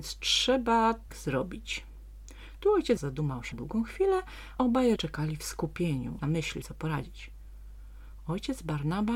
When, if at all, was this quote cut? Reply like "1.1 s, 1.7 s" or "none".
1.1 s, 3.0 s, 3.5 s, 4.6 s, 5.0 s, 6.2 s, 6.6 s